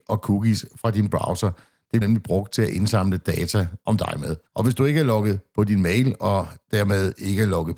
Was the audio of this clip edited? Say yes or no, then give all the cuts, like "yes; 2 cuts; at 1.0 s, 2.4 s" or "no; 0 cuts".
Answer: yes; 2 cuts; at 2.0 s, 4.5 s